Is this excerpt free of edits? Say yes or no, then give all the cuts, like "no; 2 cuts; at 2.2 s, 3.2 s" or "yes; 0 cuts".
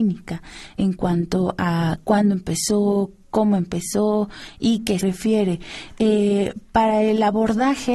no; 1 cut; at 5.0 s